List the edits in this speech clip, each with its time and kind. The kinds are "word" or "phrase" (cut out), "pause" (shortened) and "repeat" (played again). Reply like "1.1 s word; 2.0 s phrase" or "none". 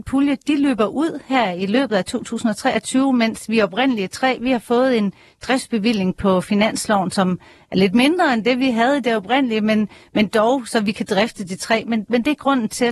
none